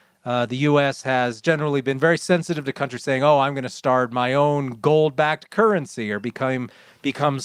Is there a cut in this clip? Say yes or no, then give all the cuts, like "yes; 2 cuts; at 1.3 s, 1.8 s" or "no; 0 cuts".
no; 0 cuts